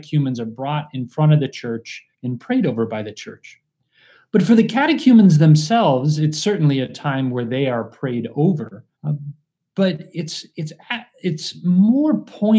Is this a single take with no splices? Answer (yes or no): no